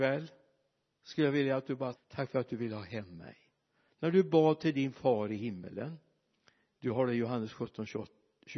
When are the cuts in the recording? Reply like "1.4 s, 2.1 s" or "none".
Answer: 1.9 s